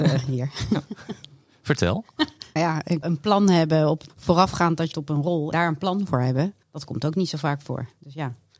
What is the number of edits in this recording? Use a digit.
6